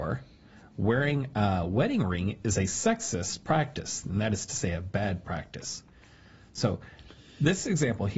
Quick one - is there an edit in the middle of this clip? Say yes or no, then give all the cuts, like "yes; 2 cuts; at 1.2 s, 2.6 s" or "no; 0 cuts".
no; 0 cuts